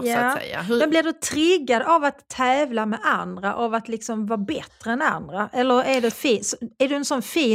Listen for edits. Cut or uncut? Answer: cut